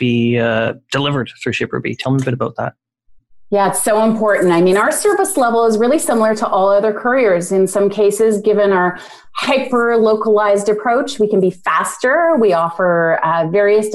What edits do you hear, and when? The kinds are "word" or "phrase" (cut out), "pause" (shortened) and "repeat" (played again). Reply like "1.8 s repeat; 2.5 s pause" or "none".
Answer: none